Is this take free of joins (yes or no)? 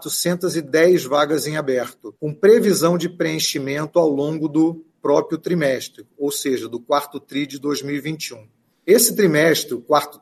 no